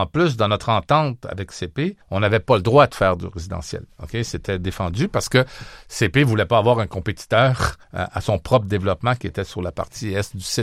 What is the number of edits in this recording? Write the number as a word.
two